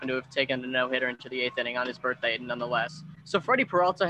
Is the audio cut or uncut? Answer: cut